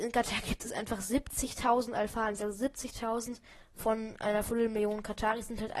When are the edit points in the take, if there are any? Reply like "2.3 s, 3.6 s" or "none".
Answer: none